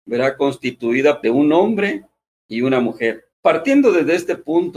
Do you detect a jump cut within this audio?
yes; 2 cuts; at 1.2 s, 3.3 s

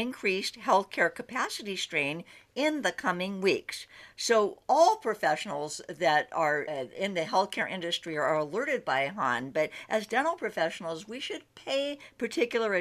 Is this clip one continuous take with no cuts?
yes; 0 cuts

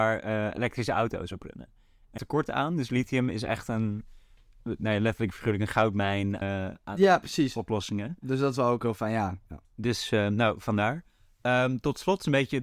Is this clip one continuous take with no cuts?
no; 3 cuts; at 2.2 s, 6.4 s, 9.6 s

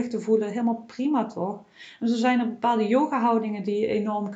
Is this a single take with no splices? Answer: yes; 0 cuts

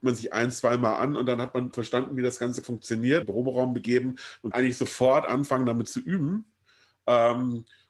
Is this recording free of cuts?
no; 4 cuts; at 1.7 s, 2.6 s, 3.2 s, 4.5 s

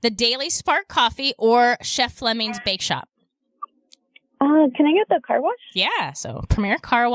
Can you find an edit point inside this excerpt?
no; 0 cuts

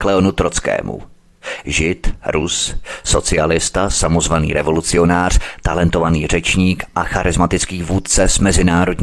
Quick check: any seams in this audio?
no; 0 cuts

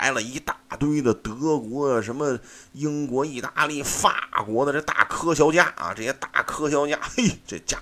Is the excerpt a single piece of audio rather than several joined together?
yes; 0 cuts

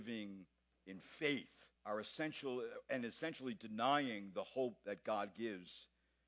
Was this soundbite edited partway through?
yes; 1 cut; at 1.8 s

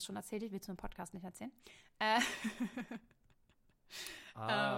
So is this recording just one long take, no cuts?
yes; 0 cuts

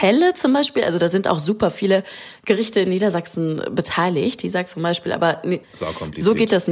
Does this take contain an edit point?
yes; 1 cut; at 5.6 s

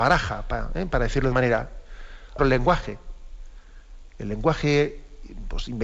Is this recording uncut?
no; 2 cuts; at 1.3 s, 2.4 s

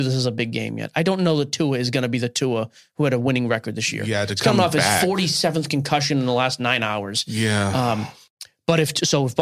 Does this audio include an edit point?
no; 0 cuts

